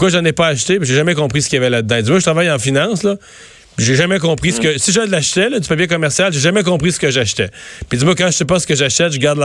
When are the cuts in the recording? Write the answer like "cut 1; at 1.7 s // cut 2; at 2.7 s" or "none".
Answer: none